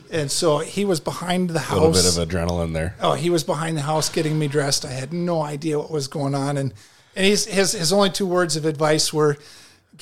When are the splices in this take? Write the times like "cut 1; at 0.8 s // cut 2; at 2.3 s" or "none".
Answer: none